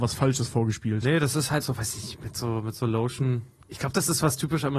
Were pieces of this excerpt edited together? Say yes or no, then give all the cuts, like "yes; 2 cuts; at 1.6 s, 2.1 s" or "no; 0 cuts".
yes; 2 cuts; at 1.6 s, 2.2 s